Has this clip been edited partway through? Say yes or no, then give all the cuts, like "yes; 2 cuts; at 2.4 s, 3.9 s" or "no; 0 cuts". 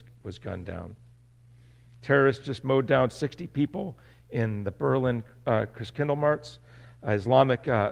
no; 0 cuts